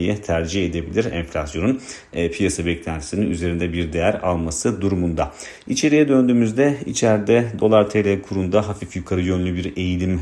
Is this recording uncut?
yes; 0 cuts

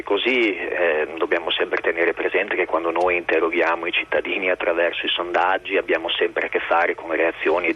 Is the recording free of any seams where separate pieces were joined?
yes; 0 cuts

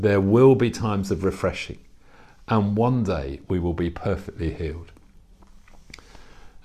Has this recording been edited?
no; 0 cuts

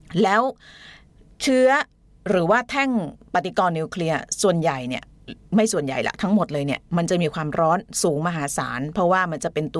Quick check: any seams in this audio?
no; 0 cuts

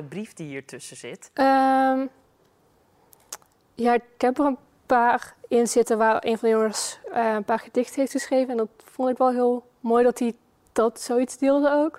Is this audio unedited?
yes; 0 cuts

